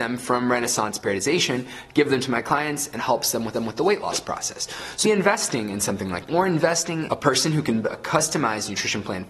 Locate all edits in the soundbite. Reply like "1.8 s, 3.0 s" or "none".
3.0 s, 3.5 s, 5.0 s, 6.3 s, 7.1 s, 7.8 s